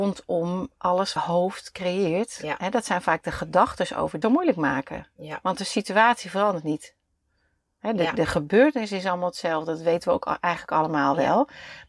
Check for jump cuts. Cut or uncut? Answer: cut